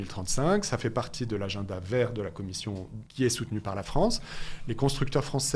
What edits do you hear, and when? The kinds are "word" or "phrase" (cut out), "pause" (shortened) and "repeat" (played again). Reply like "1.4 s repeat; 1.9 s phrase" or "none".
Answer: 3.1 s pause